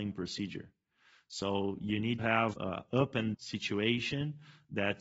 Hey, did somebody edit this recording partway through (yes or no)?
yes